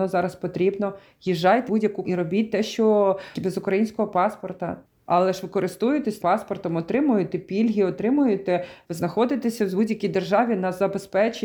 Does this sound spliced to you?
yes; 6 cuts; at 1.7 s, 2.0 s, 3.3 s, 4.8 s, 6.2 s, 8.8 s

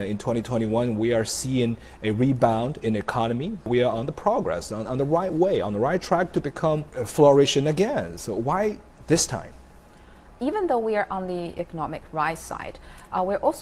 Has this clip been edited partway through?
no; 0 cuts

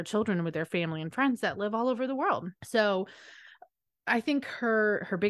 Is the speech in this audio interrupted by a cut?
yes; 1 cut; at 2.6 s

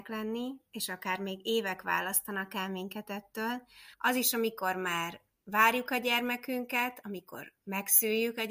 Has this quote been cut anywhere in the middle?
yes; 1 cut; at 3.9 s

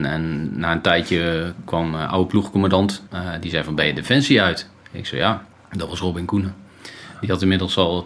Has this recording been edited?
yes; 2 cuts; at 3.1 s, 5.5 s

